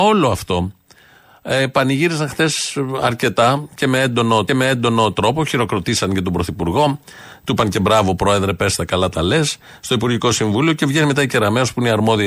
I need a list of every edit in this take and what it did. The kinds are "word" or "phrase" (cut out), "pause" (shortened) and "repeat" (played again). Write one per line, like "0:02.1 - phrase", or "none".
0:04.5 - repeat